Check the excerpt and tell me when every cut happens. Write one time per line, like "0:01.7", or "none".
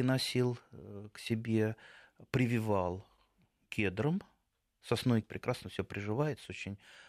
0:05.2